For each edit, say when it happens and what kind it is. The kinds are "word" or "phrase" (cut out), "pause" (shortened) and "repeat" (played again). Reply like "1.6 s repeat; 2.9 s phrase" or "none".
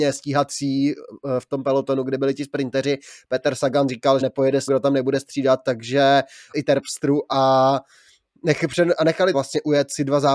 3.9 s word; 4.2 s word; 4.7 s word; 6.5 s word; 9.3 s word